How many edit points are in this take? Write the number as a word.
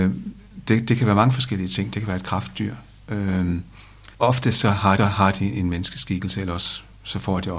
two